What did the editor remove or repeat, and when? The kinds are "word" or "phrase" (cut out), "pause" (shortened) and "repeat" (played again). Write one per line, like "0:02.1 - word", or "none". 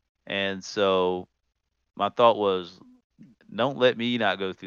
none